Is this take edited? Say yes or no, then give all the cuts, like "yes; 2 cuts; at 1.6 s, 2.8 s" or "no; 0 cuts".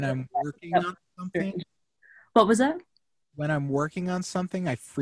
no; 0 cuts